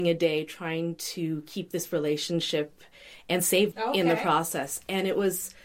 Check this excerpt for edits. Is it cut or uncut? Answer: cut